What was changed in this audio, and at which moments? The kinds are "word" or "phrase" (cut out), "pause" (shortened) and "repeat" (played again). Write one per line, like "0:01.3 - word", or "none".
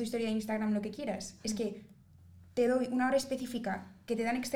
none